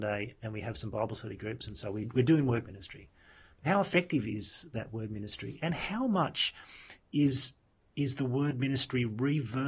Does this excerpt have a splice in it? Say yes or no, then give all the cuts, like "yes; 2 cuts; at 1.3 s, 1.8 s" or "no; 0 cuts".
no; 0 cuts